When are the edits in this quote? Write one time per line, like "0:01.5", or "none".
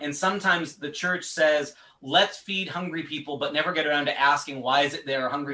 none